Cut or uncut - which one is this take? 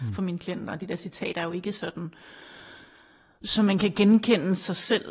uncut